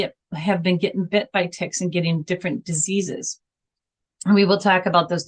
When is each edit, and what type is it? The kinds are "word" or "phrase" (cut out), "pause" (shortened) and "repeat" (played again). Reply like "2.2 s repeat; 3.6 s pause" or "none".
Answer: none

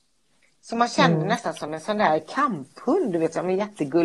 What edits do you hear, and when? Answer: none

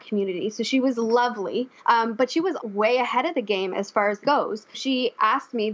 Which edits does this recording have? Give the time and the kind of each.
1.8 s pause; 2.6 s word; 4.2 s word; 4.7 s word

